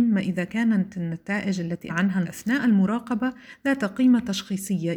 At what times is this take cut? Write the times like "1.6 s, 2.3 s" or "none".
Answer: 1.9 s, 2.2 s